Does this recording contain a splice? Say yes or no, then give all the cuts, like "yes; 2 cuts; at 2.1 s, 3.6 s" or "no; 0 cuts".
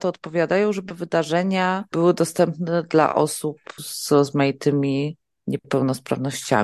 no; 0 cuts